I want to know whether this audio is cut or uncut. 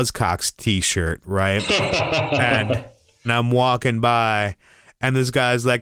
cut